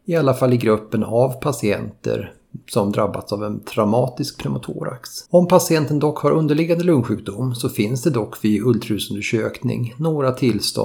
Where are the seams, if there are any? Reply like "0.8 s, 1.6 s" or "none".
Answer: 5.3 s